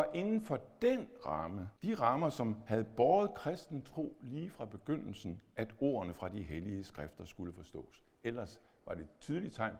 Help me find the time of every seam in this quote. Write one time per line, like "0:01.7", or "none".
0:01.8